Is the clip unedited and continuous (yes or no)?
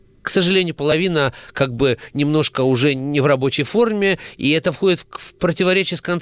yes